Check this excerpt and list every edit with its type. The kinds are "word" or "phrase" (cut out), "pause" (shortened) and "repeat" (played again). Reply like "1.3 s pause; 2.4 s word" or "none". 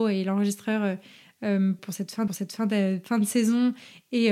1.8 s phrase; 2.3 s repeat